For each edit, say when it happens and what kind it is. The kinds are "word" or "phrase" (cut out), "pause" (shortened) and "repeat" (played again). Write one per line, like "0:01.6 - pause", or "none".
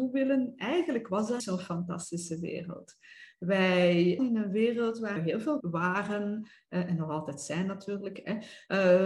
0:01.4 - word
0:04.2 - word
0:05.2 - word
0:05.6 - word

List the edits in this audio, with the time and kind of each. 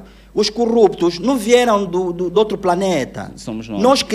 none

